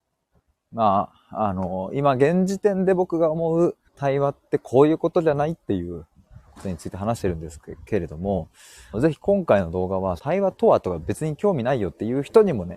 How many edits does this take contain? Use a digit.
3